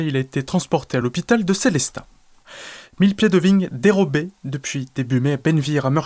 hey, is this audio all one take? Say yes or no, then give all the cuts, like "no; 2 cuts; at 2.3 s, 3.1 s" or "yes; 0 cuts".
yes; 0 cuts